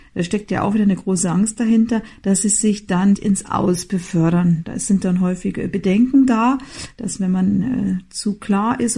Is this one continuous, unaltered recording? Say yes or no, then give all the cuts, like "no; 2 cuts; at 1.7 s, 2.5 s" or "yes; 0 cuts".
no; 1 cut; at 3.1 s